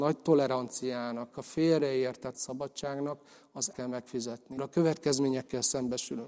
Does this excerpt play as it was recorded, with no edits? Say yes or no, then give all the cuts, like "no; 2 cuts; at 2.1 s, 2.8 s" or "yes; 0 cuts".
no; 4 cuts; at 1.3 s, 2.3 s, 3.7 s, 4.6 s